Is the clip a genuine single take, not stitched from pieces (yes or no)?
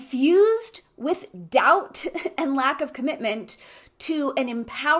yes